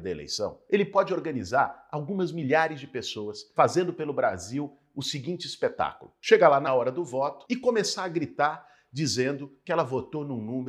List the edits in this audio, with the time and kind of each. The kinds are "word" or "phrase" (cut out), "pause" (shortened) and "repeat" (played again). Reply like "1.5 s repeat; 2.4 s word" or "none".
6.7 s phrase